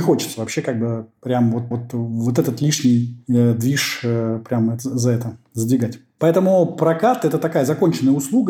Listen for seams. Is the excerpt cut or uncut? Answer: cut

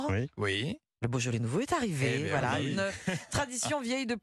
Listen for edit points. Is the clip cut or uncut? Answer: uncut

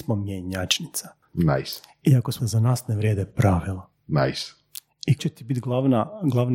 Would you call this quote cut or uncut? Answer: cut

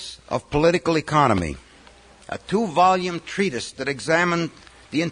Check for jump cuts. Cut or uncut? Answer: uncut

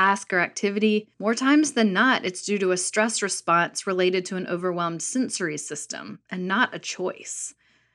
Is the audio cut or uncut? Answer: cut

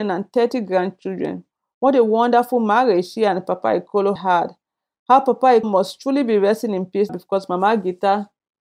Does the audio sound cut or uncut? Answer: cut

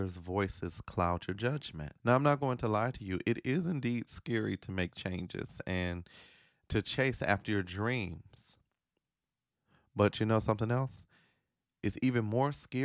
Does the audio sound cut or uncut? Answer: cut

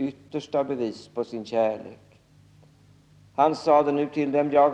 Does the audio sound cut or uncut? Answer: uncut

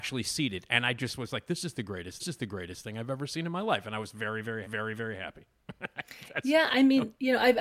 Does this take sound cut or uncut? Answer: cut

